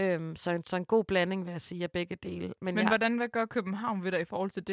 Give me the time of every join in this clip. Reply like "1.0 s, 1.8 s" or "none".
none